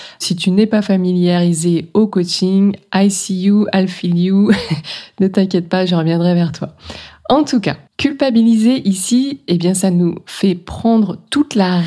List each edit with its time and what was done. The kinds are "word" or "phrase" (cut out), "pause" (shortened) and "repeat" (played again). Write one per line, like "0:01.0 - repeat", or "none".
0:07.9 - pause